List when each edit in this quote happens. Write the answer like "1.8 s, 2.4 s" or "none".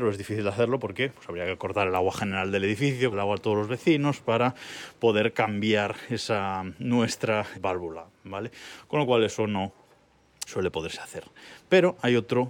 1.1 s, 3.1 s, 7.5 s, 10.5 s